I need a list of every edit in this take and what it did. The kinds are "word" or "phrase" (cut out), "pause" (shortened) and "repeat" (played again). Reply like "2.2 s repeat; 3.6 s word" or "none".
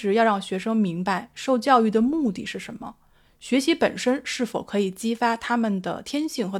none